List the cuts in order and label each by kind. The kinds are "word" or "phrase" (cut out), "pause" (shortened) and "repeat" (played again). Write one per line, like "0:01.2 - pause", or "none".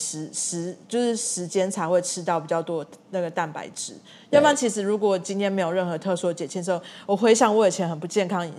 none

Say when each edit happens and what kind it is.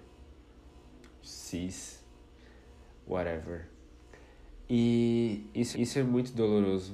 0:01.2 - word
0:05.7 - repeat

